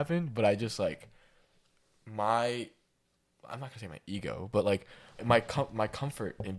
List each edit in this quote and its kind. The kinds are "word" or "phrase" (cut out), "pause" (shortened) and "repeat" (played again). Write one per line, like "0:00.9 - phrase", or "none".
0:05.2 - word